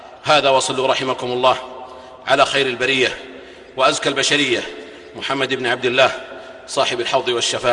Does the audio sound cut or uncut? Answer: uncut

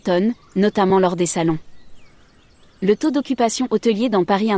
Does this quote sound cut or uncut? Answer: uncut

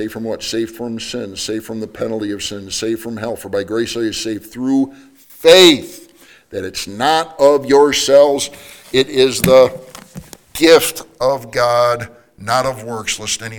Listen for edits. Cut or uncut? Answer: uncut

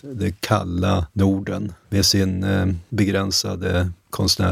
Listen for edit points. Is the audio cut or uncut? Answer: cut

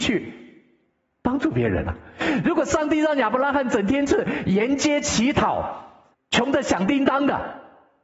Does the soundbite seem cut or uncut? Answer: cut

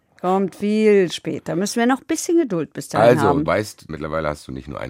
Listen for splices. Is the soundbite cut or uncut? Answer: cut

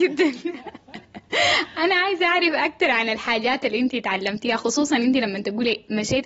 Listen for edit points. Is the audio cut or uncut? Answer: uncut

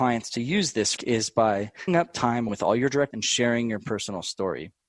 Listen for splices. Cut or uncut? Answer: cut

